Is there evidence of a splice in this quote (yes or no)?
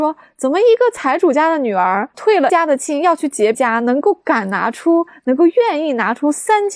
yes